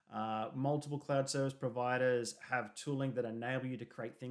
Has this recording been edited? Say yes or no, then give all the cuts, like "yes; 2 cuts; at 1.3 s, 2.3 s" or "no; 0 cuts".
no; 0 cuts